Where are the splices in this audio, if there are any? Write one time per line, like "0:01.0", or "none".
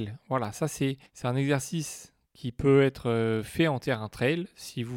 0:01.1

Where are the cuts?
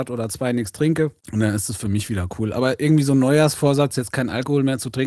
0:01.2

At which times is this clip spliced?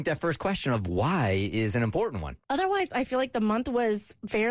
0:02.4

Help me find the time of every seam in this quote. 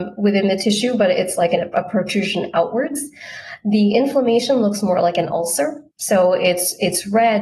0:05.9

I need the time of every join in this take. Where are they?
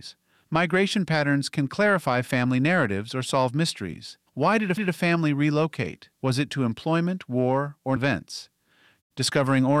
0:04.3
0:04.8
0:06.1
0:06.5
0:08.0

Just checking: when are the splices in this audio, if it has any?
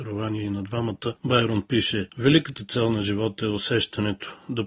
none

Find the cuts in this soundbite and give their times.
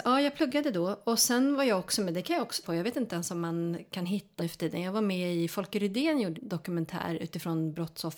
0:02.6
0:04.4
0:06.3

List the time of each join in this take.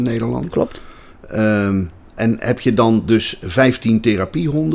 none

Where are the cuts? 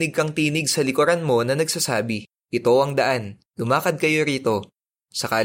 0:02.4
0:03.5

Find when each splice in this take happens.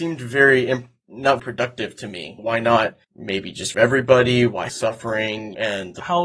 0:01.4
0:03.0
0:03.7
0:04.7

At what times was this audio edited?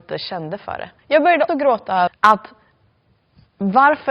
0:01.0
0:01.5
0:02.1

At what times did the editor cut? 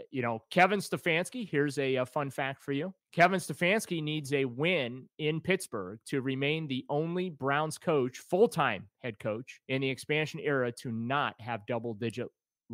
0:03.0
0:09.6

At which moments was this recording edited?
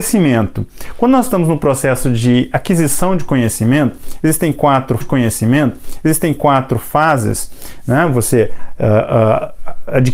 0:05.0

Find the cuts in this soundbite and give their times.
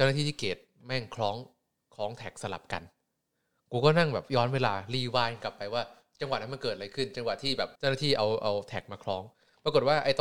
0:07.8

